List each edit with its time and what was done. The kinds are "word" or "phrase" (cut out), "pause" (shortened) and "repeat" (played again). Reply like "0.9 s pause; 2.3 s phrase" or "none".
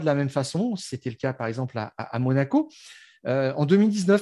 none

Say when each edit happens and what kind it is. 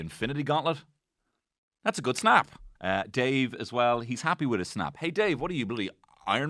2.8 s pause

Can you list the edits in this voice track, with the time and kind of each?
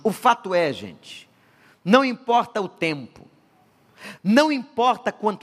none

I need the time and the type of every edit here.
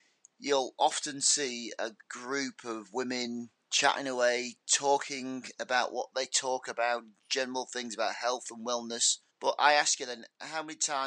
2.0 s pause; 3.6 s pause; 9.3 s pause

